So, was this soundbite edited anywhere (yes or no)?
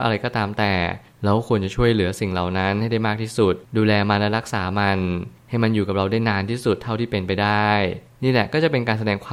yes